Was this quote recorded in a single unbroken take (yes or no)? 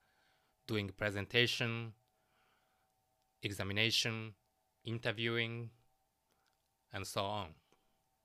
yes